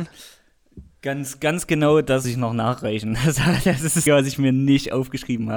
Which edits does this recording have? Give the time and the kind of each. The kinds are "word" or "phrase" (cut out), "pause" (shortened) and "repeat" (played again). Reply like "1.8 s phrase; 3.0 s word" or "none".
2.2 s word; 4.1 s word